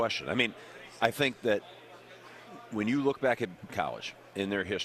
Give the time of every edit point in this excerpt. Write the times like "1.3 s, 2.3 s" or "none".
3.7 s